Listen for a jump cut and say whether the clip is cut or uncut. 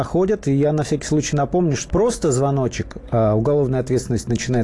cut